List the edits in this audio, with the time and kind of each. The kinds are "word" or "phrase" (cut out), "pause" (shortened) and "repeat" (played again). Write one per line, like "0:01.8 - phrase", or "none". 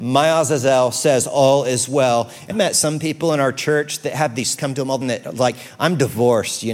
0:02.5 - word
0:04.6 - phrase
0:05.0 - word